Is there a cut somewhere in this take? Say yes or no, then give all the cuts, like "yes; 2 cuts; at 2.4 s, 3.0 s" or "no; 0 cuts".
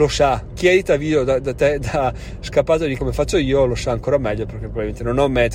yes; 1 cut; at 3.0 s